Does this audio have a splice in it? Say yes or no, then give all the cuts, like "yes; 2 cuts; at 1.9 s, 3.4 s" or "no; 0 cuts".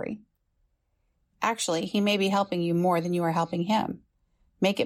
no; 0 cuts